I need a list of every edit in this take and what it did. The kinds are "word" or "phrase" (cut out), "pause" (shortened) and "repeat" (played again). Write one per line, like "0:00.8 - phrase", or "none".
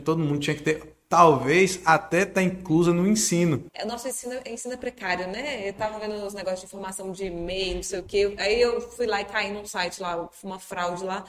0:03.7 - pause